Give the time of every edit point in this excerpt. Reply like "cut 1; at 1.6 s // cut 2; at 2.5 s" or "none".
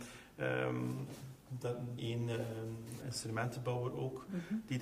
cut 1; at 2.0 s // cut 2; at 3.0 s

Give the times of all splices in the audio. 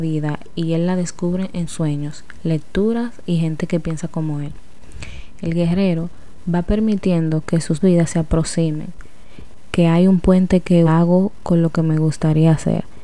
cut 1; at 1.7 s // cut 2; at 7.8 s // cut 3; at 10.9 s

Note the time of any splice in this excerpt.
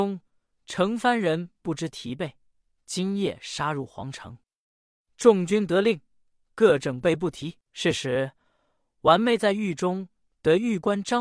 cut 1; at 7.6 s

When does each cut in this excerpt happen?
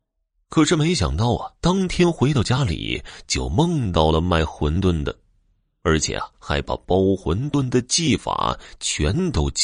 cut 1; at 1.5 s // cut 2; at 6.3 s

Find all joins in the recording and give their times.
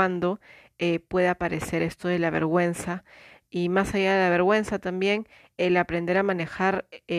none

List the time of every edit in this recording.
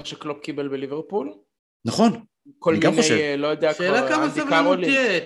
none

